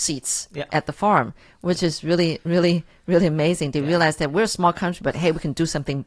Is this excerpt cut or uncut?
uncut